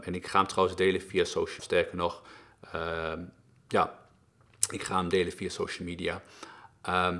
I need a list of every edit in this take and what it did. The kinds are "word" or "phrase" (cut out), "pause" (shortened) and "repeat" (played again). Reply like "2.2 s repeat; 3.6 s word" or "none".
1.6 s phrase